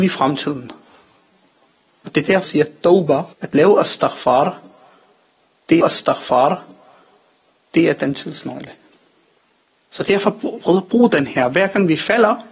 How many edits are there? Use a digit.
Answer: 4